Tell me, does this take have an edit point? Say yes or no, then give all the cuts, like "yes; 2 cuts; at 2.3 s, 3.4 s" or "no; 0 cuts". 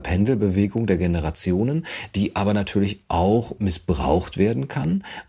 no; 0 cuts